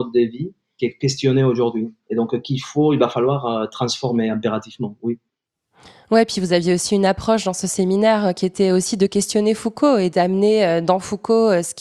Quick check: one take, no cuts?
yes; 0 cuts

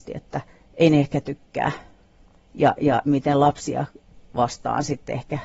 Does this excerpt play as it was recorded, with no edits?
no; 1 cut; at 3.1 s

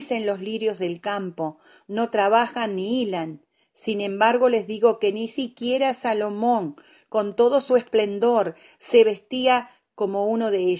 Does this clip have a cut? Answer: no; 0 cuts

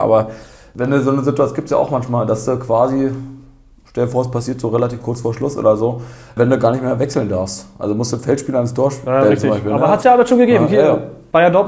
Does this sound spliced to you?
no; 0 cuts

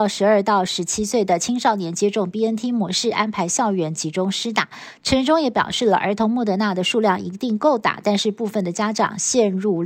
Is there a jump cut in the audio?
no; 0 cuts

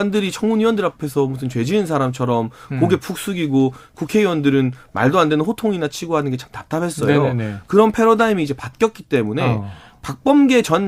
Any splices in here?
no; 0 cuts

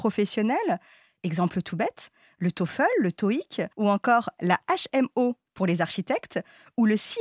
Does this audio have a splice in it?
yes; 1 cut; at 3.7 s

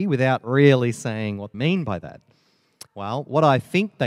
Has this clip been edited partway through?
yes; 2 cuts; at 1.5 s, 2.9 s

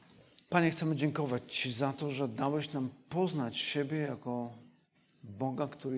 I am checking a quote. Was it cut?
no; 0 cuts

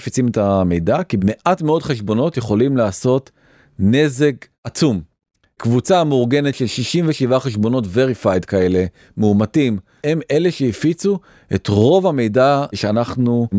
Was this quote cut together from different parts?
no; 0 cuts

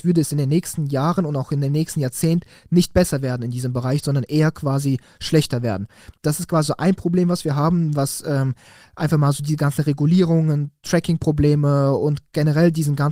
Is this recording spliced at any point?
no; 0 cuts

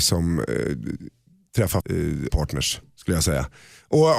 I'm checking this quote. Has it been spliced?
yes; 2 cuts; at 1.8 s, 2.3 s

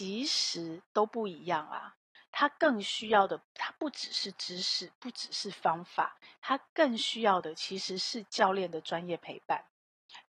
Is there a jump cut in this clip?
no; 0 cuts

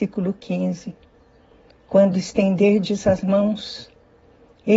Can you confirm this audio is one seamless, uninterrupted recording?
yes; 0 cuts

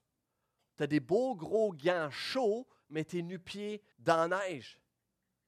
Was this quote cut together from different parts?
yes; 1 cut; at 3.9 s

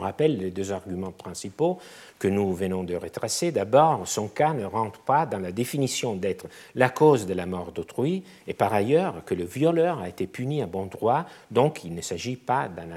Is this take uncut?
yes; 0 cuts

